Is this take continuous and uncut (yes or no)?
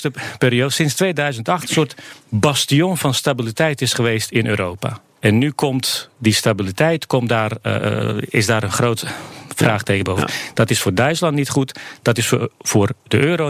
yes